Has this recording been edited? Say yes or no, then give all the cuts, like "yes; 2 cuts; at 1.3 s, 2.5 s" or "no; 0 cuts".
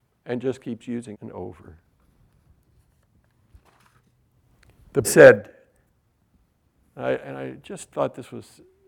yes; 2 cuts; at 1.1 s, 5.0 s